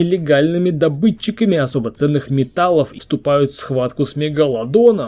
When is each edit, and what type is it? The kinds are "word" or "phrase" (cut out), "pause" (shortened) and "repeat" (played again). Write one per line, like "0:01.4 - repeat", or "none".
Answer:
0:03.0 - word